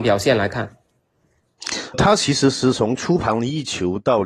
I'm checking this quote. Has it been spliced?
yes; 1 cut; at 1.9 s

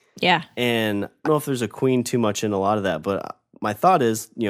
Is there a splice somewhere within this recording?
yes; 1 cut; at 1.2 s

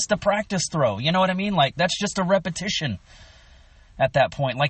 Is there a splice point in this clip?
no; 0 cuts

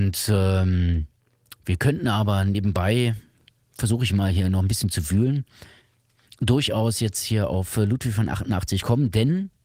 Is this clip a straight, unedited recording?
yes; 0 cuts

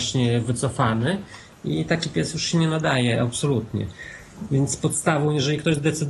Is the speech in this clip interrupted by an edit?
no; 0 cuts

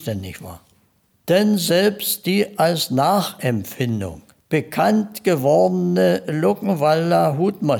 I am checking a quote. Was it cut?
no; 0 cuts

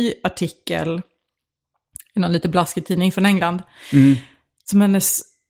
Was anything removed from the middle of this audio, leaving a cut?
no; 0 cuts

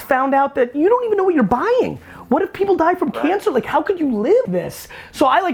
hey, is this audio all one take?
no; 1 cut; at 4.4 s

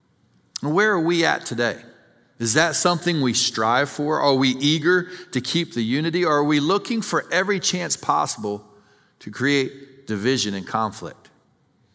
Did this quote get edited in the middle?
no; 0 cuts

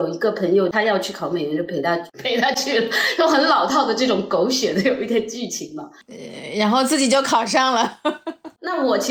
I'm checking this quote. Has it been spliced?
yes; 1 cut; at 6.0 s

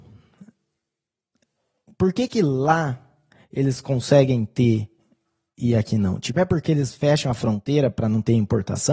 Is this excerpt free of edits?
yes; 0 cuts

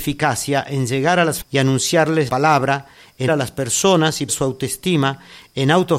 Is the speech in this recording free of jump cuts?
no; 4 cuts; at 1.4 s, 2.3 s, 3.3 s, 4.3 s

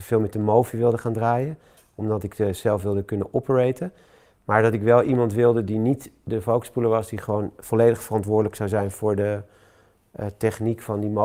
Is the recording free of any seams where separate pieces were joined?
yes; 0 cuts

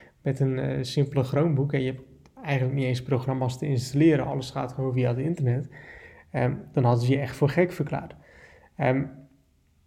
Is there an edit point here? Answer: no; 0 cuts

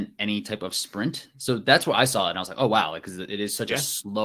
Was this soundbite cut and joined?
no; 0 cuts

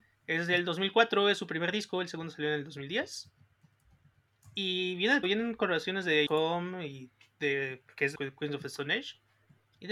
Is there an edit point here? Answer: yes; 3 cuts; at 5.2 s, 6.3 s, 8.1 s

